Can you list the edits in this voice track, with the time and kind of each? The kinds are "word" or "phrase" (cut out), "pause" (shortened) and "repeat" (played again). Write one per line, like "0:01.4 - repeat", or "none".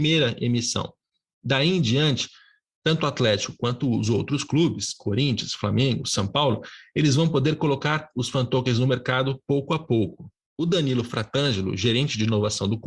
none